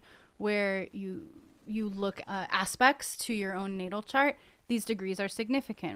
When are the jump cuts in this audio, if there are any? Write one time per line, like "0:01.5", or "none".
0:02.2